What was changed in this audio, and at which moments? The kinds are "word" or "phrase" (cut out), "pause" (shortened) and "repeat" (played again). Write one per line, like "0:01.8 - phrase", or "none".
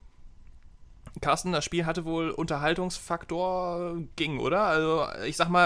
none